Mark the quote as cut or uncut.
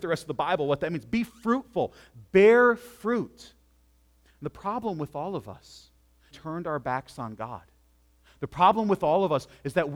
cut